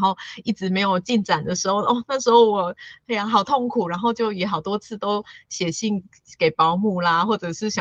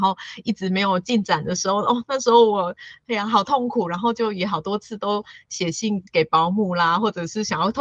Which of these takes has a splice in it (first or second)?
second